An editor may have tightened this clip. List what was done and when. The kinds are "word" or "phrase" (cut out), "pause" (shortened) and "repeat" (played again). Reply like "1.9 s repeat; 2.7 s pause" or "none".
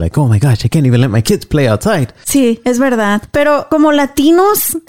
none